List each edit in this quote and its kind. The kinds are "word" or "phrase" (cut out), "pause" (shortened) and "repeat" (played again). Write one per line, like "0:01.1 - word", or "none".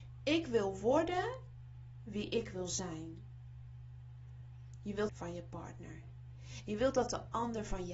0:05.1 - phrase